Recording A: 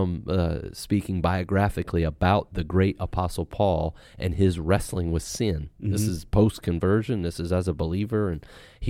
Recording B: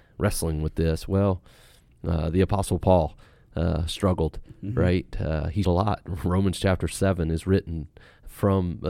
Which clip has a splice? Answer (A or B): B